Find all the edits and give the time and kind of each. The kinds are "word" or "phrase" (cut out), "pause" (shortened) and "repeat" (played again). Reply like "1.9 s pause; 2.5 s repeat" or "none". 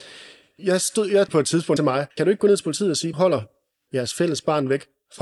1.3 s word; 1.8 s phrase; 2.1 s pause; 3.1 s phrase; 3.9 s word